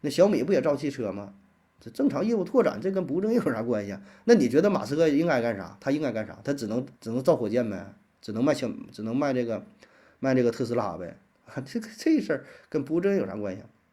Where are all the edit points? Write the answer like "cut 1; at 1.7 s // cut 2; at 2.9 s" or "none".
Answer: cut 1; at 7.0 s